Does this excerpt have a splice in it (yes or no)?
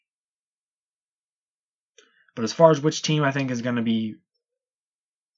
no